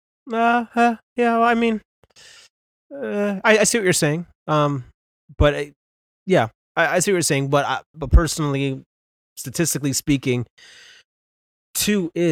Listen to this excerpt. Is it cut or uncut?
uncut